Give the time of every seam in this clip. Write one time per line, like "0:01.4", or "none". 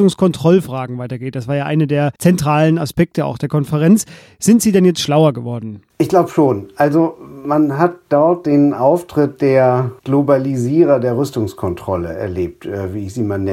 0:02.2
0:10.0